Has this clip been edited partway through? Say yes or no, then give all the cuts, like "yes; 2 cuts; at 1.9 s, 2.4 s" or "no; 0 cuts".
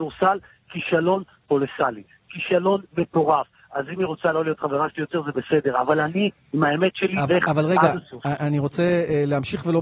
yes; 1 cut; at 7.3 s